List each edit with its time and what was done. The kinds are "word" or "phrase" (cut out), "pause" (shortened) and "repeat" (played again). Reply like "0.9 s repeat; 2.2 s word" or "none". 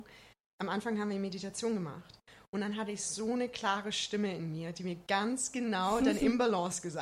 none